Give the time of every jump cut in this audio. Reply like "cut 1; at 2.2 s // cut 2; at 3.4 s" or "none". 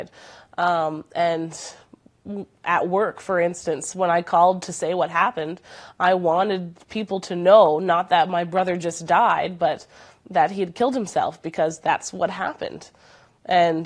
none